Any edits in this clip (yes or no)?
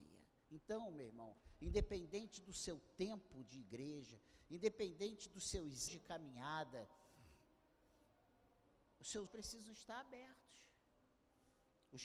yes